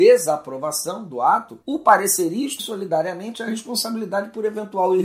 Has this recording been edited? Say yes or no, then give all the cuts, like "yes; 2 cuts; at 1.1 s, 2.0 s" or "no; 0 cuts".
yes; 2 cuts; at 1.6 s, 2.6 s